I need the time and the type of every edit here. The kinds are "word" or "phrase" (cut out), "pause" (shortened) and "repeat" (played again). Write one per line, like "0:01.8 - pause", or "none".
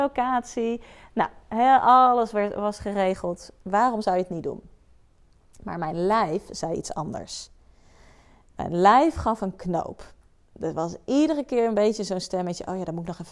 0:03.6 - pause